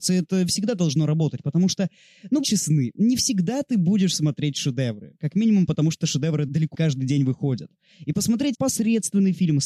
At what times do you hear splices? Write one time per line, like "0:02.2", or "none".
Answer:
0:02.4
0:06.7
0:08.5